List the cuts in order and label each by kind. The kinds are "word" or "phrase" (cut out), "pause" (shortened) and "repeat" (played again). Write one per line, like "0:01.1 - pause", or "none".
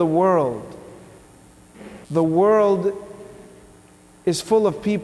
0:02.0 - pause